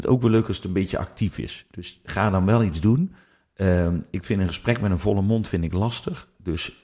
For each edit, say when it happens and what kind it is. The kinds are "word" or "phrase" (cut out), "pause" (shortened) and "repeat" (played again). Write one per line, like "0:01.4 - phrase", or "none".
none